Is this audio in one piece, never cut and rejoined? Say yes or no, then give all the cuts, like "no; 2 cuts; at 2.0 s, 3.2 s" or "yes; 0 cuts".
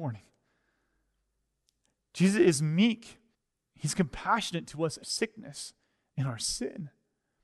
no; 2 cuts; at 3.3 s, 5.0 s